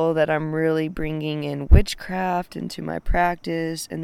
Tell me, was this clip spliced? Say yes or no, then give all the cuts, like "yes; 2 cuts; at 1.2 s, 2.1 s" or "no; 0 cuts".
no; 0 cuts